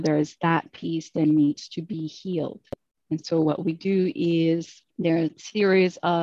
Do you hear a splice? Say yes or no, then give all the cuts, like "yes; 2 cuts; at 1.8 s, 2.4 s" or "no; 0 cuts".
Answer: yes; 2 cuts; at 2.9 s, 4.9 s